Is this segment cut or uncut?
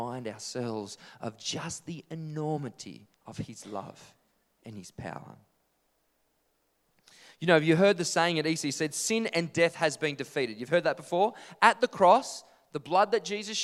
cut